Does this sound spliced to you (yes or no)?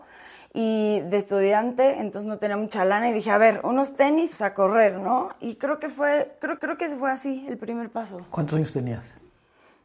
yes